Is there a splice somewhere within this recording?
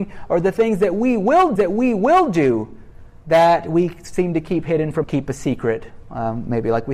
yes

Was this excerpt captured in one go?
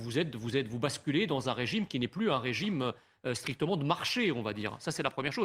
yes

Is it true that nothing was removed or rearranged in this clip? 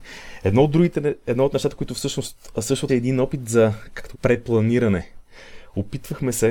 no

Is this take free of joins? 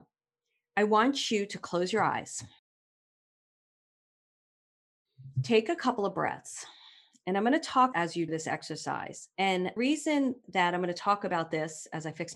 no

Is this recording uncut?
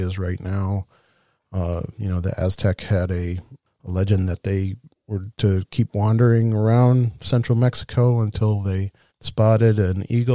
no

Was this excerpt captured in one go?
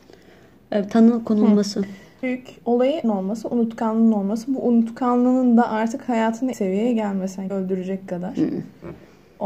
no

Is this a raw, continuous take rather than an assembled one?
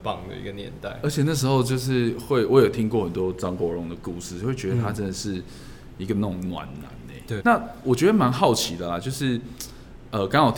no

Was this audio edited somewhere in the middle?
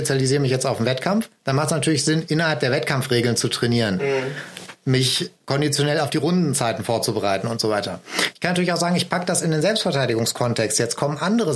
no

